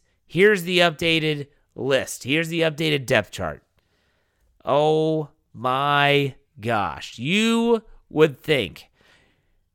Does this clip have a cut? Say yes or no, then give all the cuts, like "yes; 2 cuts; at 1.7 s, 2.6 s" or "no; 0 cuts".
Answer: no; 0 cuts